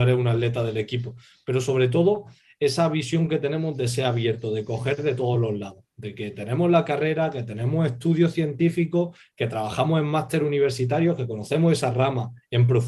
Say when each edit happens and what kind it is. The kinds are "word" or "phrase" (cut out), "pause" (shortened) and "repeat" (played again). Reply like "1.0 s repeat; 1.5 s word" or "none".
none